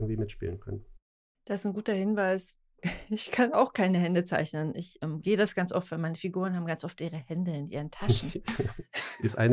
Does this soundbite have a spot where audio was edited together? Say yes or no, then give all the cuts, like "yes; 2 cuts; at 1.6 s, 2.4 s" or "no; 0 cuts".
no; 0 cuts